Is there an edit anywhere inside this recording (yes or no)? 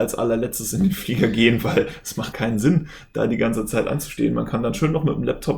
yes